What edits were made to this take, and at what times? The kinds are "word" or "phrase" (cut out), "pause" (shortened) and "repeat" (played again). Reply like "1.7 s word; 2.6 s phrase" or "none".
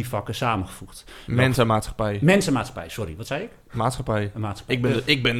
none